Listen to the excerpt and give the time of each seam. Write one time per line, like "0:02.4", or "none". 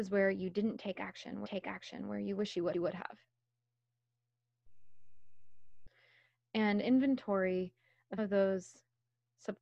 0:01.4
0:02.7
0:06.8
0:08.2